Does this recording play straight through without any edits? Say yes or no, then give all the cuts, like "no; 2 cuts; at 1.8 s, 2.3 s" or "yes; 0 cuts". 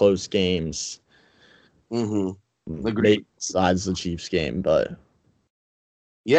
yes; 0 cuts